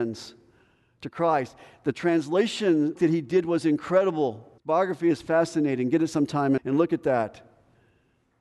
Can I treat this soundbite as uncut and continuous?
no; 3 cuts; at 3.0 s, 4.6 s, 6.6 s

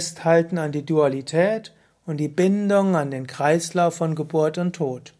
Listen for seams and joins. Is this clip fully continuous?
yes; 0 cuts

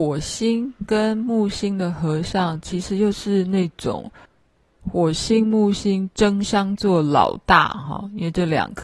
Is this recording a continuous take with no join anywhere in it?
yes; 0 cuts

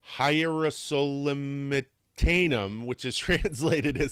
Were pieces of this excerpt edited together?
no; 0 cuts

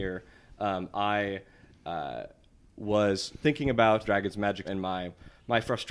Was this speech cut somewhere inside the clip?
yes; 3 cuts; at 3.4 s, 4.0 s, 4.6 s

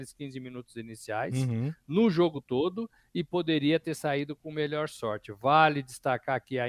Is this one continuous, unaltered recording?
yes; 0 cuts

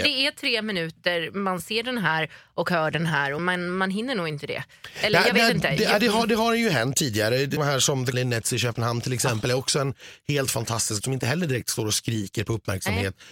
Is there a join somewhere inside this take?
yes; 4 cuts; at 3.4 s, 7.6 s, 8.1 s, 11.0 s

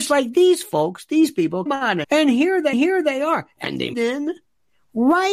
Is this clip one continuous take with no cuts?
no; 4 cuts; at 1.7 s, 2.0 s, 2.7 s, 3.9 s

